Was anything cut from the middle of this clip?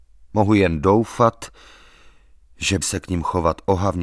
yes; 1 cut; at 2.8 s

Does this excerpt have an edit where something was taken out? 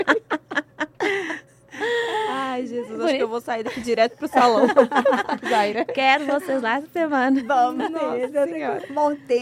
no; 0 cuts

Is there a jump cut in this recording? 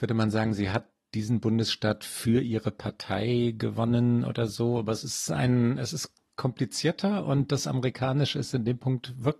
no; 0 cuts

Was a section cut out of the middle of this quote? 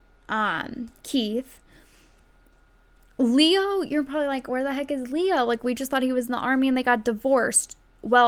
no; 0 cuts

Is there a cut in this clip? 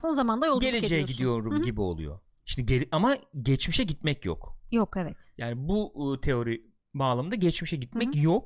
no; 0 cuts

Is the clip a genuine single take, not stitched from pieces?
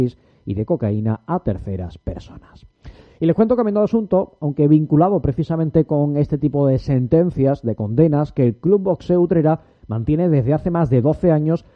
yes; 0 cuts

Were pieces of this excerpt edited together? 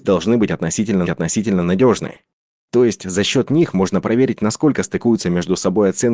yes; 1 cut; at 1.1 s

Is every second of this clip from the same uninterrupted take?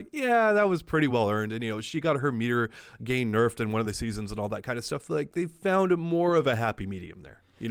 yes; 0 cuts

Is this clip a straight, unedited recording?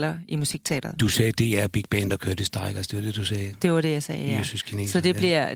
yes; 0 cuts

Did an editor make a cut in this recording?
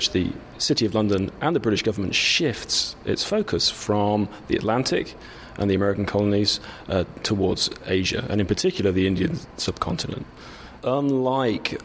no; 0 cuts

